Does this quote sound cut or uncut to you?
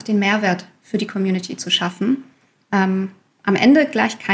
uncut